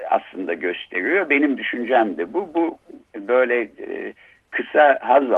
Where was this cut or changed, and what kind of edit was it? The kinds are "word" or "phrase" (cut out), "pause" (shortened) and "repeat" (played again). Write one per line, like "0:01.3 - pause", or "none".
none